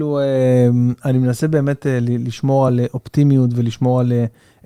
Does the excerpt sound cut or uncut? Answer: uncut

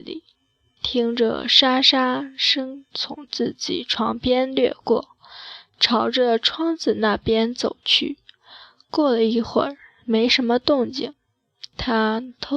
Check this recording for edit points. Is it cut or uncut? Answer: uncut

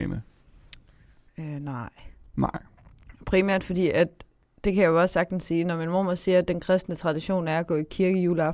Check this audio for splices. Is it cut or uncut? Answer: uncut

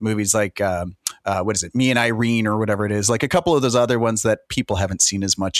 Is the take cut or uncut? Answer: uncut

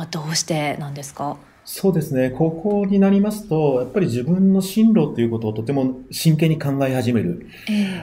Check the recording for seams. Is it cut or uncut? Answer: uncut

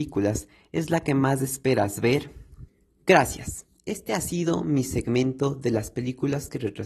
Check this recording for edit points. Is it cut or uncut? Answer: uncut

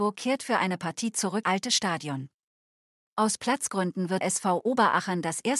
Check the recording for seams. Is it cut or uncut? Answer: cut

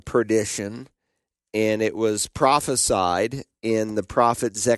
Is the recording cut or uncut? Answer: uncut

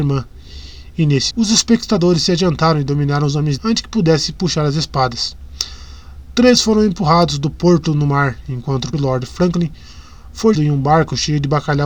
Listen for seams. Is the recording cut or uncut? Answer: cut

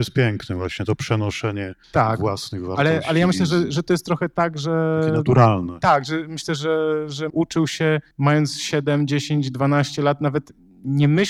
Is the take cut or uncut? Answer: cut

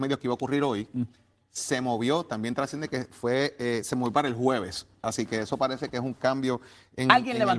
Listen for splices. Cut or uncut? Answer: uncut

